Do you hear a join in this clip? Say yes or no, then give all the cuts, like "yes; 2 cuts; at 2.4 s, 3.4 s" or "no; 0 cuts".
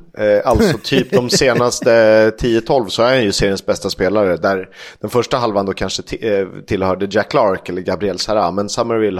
no; 0 cuts